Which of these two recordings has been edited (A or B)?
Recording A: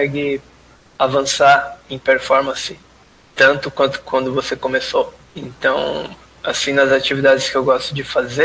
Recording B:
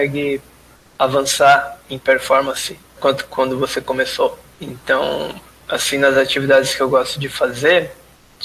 B